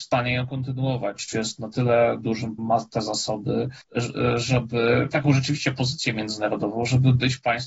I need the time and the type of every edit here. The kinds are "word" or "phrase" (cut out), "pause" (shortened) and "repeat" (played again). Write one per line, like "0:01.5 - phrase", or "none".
0:02.6 - word
0:05.1 - word

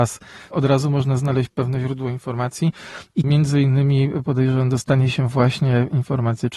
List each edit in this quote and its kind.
0:03.2 - word

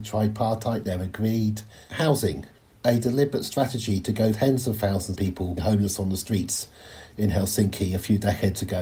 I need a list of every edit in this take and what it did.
0:04.3 - word
0:05.2 - word
0:05.6 - word

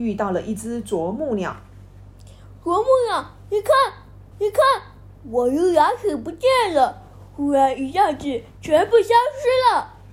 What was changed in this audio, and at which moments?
0:04.3 - repeat

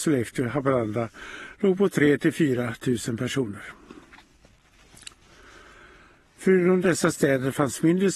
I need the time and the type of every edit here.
none

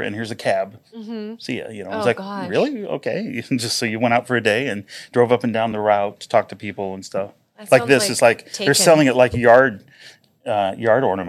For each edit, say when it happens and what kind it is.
none

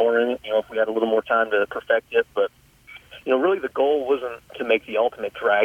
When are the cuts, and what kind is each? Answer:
0:04.5 - pause

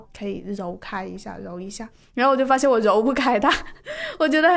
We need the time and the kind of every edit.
none

